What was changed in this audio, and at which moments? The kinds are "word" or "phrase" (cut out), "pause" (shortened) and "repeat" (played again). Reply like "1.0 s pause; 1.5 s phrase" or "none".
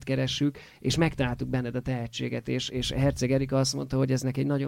2.7 s word

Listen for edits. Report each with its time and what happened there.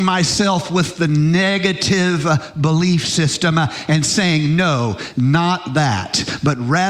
none

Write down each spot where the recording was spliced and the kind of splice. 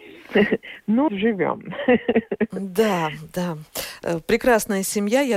1.1 s phrase

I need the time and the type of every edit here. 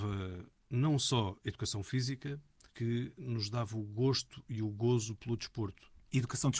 2.7 s word

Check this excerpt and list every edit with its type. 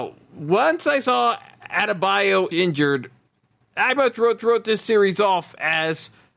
2.5 s phrase; 4.0 s word; 4.4 s repeat

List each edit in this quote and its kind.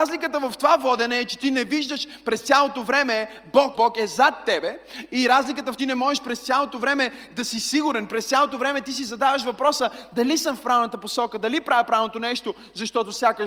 3.7 s word; 5.8 s phrase

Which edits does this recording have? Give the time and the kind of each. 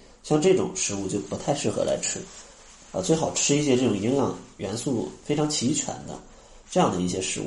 none

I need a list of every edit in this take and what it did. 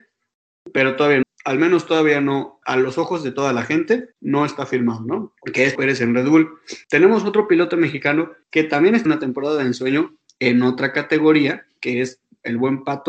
1.2 s word; 2.6 s word; 4.1 s pause; 5.4 s pause; 5.8 s word; 6.8 s pause; 8.4 s pause; 9.1 s phrase

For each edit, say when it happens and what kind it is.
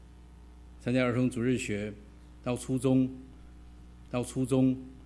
4.1 s repeat

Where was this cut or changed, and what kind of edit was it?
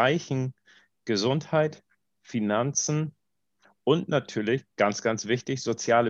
none

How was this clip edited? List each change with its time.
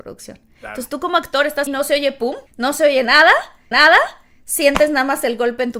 1.7 s word; 2.5 s pause; 3.7 s repeat

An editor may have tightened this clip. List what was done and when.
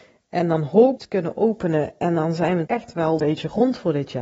1.0 s phrase; 2.7 s word; 3.2 s word

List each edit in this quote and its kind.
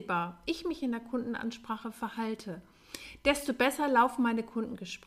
none

